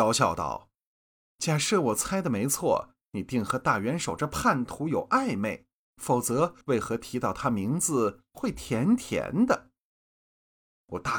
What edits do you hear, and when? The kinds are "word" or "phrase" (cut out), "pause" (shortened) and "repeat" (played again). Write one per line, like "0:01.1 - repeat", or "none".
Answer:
0:06.6 - pause